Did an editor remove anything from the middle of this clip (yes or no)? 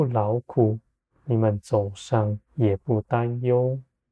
yes